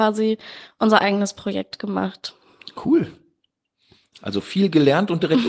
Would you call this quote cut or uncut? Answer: uncut